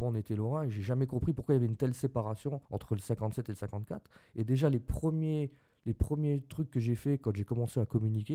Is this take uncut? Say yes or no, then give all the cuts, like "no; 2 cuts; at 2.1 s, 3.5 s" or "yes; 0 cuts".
no; 1 cut; at 2.6 s